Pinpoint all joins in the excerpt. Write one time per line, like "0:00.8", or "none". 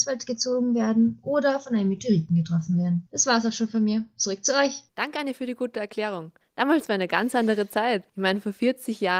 0:04.9